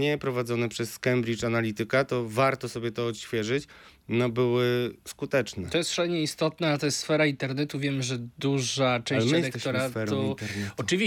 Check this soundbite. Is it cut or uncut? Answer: uncut